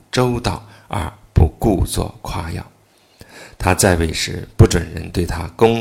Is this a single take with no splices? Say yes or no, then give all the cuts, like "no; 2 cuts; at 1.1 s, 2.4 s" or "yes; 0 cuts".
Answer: yes; 0 cuts